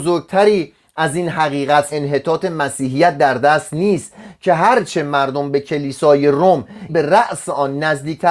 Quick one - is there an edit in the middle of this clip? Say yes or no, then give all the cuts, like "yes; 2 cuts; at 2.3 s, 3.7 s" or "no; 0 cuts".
yes; 2 cuts; at 1.9 s, 6.9 s